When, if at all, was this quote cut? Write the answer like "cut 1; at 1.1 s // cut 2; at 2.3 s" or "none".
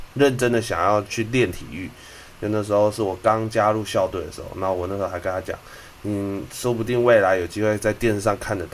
none